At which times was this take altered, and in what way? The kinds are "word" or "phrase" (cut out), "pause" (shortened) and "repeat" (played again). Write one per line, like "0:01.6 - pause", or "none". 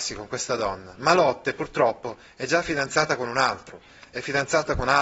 none